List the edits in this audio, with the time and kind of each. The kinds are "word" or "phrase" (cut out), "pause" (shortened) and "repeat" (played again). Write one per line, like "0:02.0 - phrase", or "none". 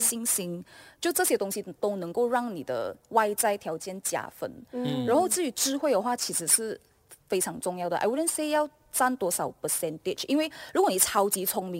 none